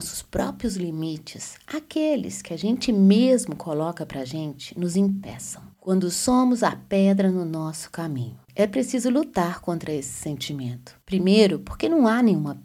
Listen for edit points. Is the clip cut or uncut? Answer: cut